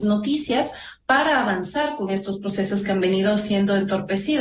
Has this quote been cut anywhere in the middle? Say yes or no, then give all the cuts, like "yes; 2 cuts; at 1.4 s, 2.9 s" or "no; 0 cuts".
no; 0 cuts